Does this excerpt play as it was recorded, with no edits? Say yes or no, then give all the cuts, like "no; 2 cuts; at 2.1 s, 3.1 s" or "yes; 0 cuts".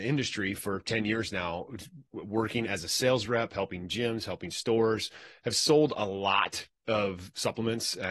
yes; 0 cuts